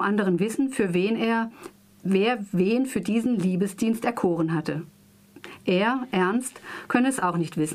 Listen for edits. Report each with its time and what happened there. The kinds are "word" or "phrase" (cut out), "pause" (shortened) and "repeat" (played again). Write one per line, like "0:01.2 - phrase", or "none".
none